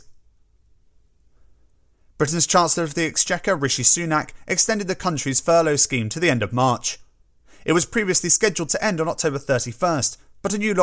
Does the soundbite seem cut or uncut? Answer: uncut